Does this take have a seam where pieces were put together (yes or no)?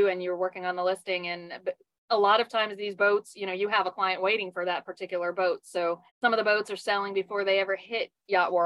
yes